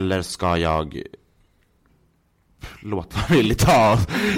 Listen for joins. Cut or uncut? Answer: cut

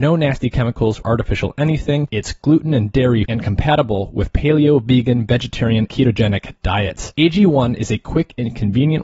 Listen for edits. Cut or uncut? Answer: cut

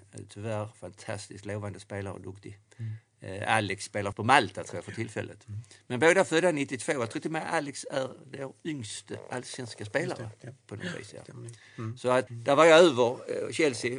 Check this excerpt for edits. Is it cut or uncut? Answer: cut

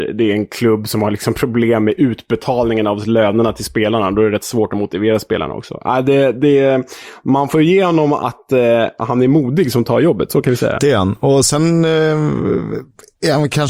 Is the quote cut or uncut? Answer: uncut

